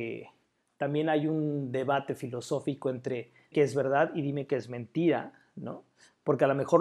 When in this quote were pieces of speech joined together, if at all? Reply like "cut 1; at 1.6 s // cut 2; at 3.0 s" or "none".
cut 1; at 3.5 s